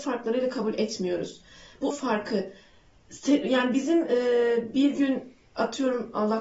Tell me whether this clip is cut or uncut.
cut